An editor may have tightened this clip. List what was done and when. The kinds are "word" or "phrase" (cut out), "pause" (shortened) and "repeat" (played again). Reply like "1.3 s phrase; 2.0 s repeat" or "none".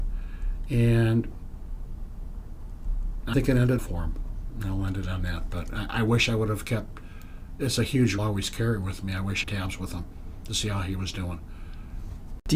3.3 s word; 3.8 s word; 8.2 s phrase; 9.4 s phrase

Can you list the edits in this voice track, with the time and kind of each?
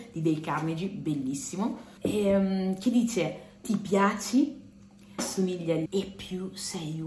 2.0 s pause; 3.6 s word; 5.2 s word; 5.9 s word

